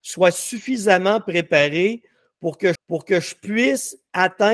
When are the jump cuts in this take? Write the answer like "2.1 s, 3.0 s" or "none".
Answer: 2.8 s